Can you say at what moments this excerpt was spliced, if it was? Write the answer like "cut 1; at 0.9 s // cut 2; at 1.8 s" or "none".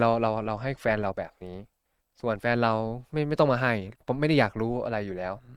none